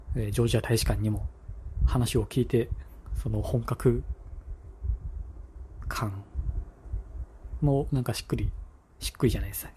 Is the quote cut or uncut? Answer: uncut